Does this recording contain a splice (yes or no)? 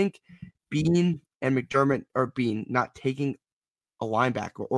no